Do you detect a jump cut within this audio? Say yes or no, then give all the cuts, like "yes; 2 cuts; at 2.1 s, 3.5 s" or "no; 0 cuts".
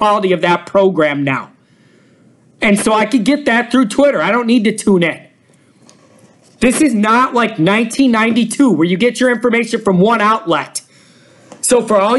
no; 0 cuts